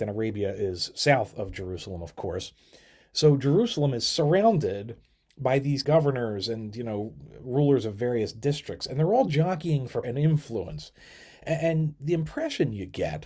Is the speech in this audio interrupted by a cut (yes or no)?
yes